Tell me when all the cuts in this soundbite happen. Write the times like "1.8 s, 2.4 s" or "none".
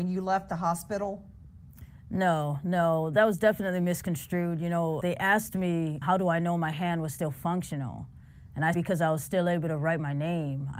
5.0 s, 6.0 s, 8.7 s